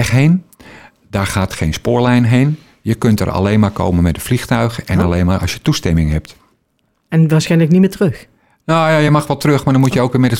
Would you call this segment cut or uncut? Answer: uncut